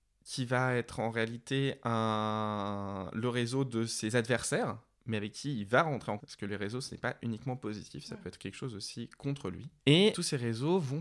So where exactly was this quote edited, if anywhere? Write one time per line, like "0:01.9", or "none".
0:06.2